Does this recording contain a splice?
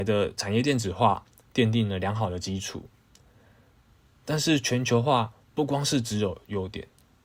no; 0 cuts

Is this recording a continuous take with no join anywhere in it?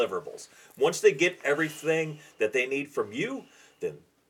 yes; 0 cuts

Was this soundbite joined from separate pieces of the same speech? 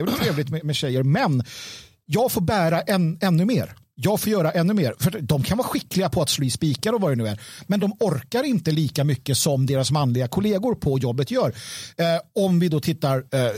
no; 0 cuts

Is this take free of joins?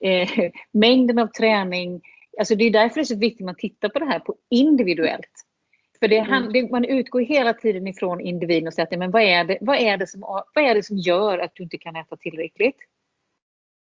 yes; 0 cuts

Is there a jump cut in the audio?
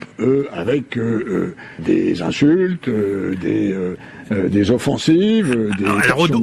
yes; 1 cut; at 1.8 s

